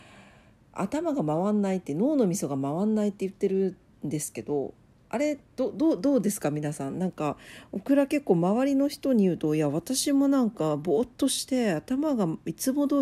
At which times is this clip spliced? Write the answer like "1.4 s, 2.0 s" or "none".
none

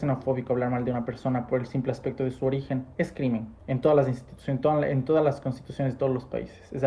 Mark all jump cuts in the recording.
3.6 s

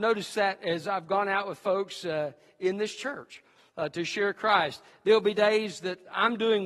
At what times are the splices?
none

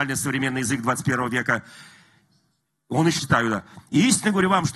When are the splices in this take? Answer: 3.2 s

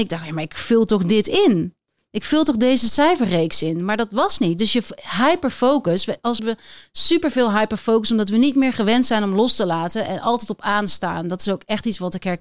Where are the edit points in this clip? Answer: 6.4 s

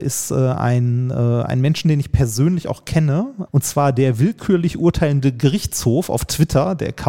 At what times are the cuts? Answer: 3.5 s

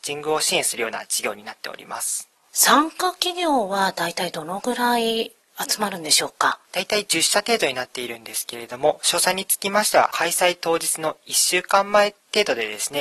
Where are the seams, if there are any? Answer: 2.3 s, 6.6 s

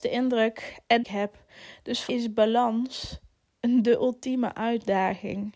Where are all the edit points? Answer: 1.0 s, 2.1 s

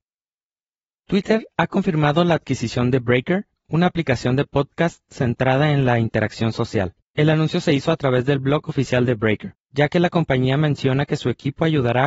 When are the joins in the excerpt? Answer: 7.1 s, 9.6 s

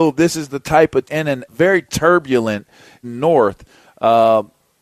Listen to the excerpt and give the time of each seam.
1.0 s, 1.5 s, 3.0 s

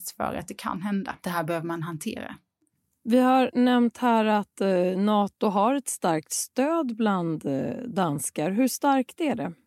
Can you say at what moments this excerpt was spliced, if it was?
1.2 s, 2.8 s

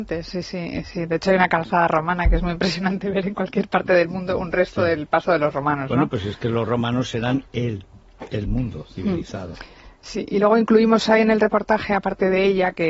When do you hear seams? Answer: none

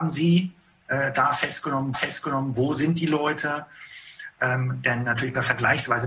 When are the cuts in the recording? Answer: 1.9 s

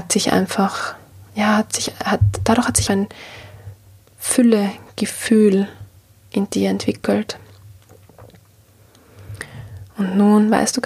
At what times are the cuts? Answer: 2.9 s

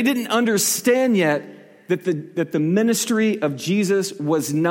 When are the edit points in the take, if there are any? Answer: none

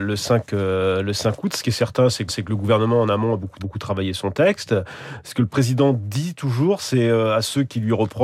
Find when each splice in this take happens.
2.3 s, 3.6 s

